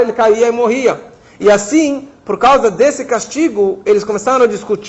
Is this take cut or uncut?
uncut